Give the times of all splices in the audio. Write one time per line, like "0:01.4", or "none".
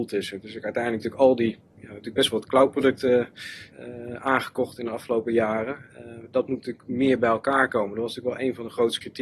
0:03.7